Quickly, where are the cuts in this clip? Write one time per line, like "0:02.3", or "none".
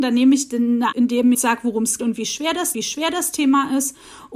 0:00.9
0:01.3
0:02.0
0:02.7